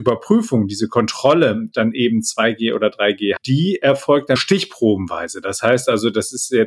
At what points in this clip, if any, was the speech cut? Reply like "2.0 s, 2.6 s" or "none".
1.7 s, 3.4 s, 4.4 s